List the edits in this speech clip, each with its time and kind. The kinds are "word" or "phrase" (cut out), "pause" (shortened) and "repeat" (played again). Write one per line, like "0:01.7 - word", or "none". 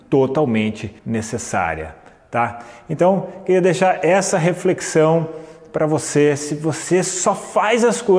0:01.0 - pause